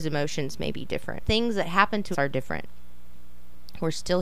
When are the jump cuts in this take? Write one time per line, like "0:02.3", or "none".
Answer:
0:01.2
0:02.1